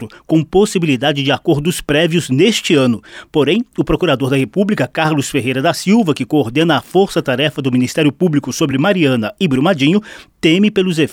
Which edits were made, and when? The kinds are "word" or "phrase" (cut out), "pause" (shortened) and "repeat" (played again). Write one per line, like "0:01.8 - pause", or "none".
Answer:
none